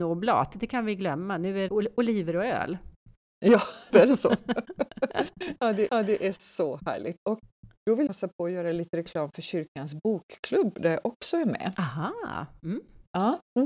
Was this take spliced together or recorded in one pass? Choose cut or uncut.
cut